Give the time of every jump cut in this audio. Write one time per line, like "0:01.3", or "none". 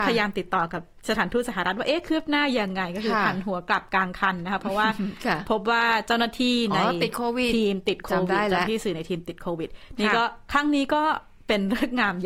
none